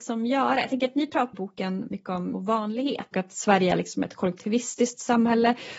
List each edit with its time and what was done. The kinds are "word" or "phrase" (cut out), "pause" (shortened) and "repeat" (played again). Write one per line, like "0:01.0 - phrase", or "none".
0:01.3 - word
0:01.9 - word
0:02.3 - word
0:03.1 - word